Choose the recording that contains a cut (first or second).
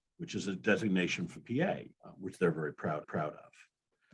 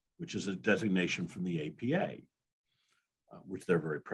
first